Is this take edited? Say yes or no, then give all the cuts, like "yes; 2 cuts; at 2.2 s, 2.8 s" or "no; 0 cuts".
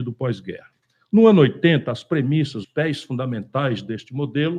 yes; 1 cut; at 2.6 s